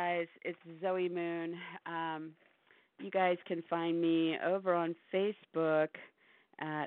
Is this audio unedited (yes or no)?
yes